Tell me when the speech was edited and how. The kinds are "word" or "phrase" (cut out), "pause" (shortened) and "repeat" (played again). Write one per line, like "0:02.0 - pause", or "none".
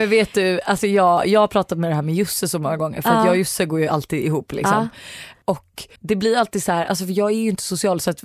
0:06.0 - pause